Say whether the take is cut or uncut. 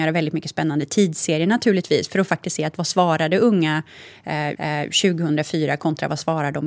cut